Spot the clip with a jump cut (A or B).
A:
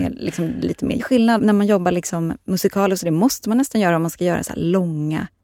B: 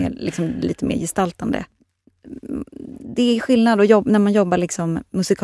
A